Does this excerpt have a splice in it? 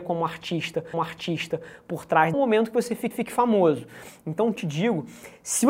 yes; 4 cuts; at 0.9 s, 2.3 s, 3.1 s, 4.6 s

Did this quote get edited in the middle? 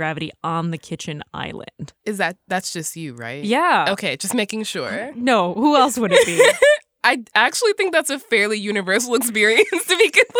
yes; 1 cut; at 2.0 s

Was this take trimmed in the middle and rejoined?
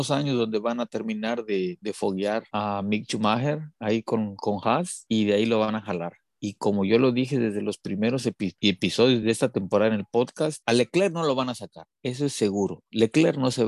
no; 0 cuts

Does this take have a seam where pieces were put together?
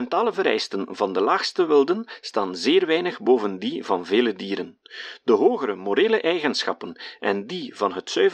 no; 0 cuts

